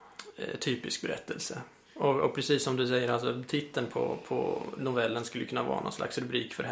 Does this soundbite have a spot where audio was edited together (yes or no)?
no